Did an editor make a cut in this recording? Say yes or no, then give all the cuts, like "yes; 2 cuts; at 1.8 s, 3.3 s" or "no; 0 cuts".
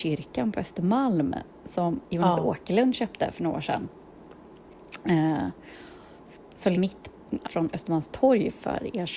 yes; 3 cuts; at 2.0 s, 6.7 s, 7.4 s